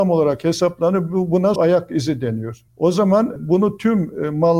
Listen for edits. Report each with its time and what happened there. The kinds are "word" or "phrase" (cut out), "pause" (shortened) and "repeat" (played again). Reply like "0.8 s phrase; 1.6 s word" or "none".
1.6 s word